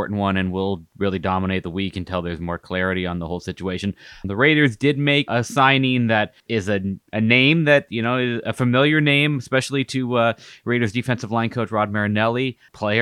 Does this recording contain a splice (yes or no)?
no